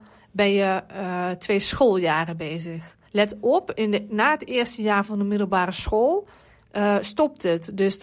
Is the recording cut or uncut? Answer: cut